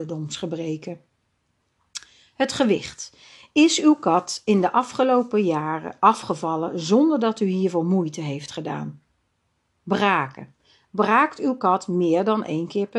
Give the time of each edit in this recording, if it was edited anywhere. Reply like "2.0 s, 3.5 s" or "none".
none

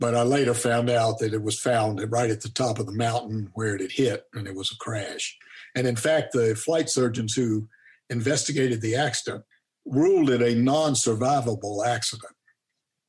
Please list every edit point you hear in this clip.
none

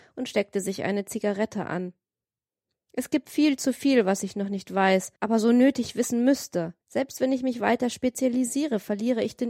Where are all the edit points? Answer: 5.2 s, 6.8 s

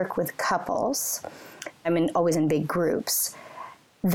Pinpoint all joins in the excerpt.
1.8 s

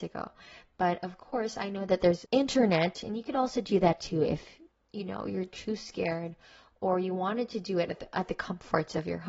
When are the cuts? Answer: none

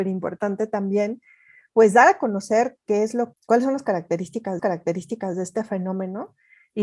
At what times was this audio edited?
3.3 s, 4.6 s

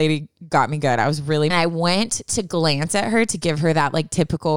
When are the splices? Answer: 1.5 s

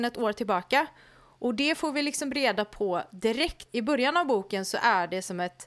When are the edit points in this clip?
3.7 s

